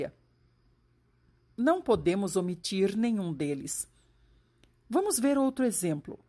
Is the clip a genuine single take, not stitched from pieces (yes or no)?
yes